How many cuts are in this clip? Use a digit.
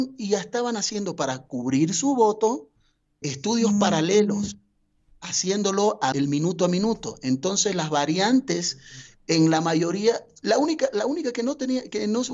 2